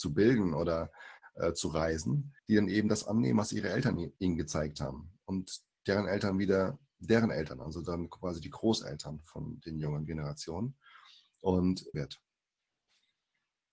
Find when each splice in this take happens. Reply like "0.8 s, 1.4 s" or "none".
2.4 s, 4.2 s, 11.9 s